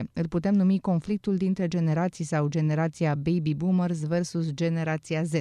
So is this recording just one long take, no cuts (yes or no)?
yes